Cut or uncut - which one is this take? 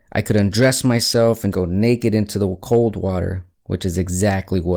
cut